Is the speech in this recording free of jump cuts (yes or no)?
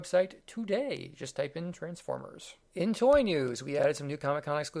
no